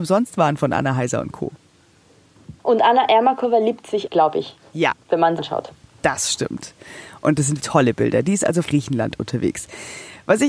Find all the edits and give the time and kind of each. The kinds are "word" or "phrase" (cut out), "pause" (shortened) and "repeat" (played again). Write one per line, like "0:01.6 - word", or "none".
0:02.6 - pause
0:04.1 - word
0:05.4 - phrase
0:07.6 - word
0:08.6 - word